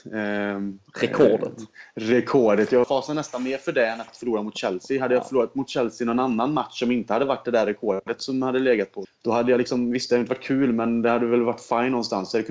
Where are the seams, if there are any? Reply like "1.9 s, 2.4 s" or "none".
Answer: 2.8 s, 4.1 s, 9.0 s